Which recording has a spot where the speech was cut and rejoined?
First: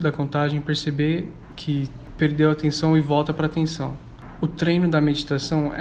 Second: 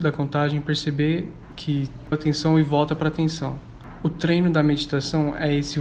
second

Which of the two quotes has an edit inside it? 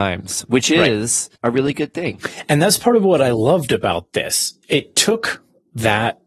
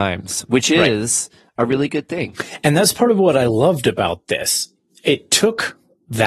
first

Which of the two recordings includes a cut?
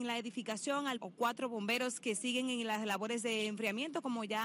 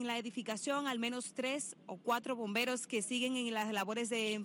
first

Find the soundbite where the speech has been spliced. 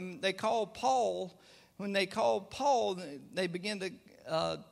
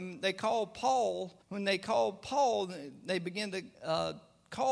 second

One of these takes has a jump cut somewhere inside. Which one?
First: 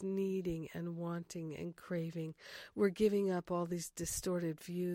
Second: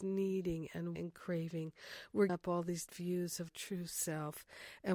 second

